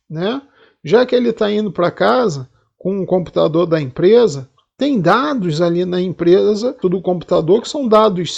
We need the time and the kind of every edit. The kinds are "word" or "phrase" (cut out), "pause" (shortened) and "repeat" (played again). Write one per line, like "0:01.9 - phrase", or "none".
0:06.8 - word

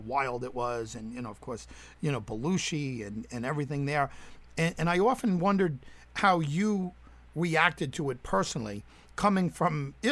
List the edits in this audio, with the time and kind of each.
none

